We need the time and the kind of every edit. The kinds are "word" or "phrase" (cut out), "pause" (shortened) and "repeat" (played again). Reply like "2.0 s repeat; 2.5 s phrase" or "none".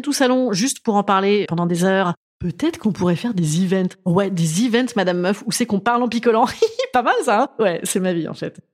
1.4 s word